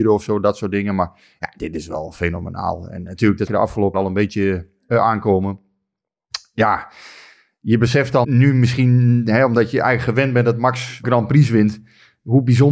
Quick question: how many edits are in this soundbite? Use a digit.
4